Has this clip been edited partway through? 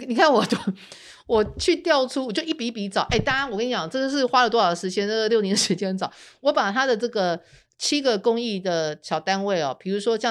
no; 0 cuts

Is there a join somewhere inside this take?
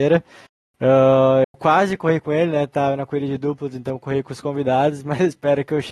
no; 0 cuts

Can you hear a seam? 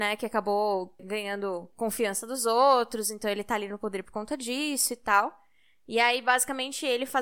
no; 0 cuts

